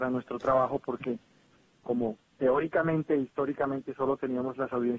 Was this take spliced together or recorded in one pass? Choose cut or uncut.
cut